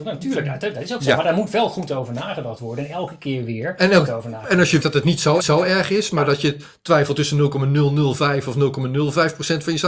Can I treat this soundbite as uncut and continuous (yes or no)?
no